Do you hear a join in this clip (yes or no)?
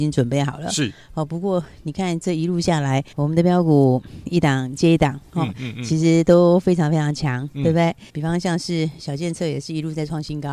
yes